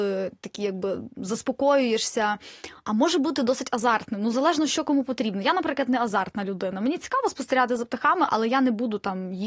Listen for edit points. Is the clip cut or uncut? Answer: uncut